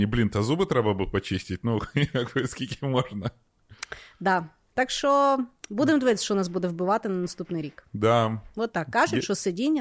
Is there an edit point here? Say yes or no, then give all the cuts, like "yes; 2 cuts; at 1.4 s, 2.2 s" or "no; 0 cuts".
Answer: no; 0 cuts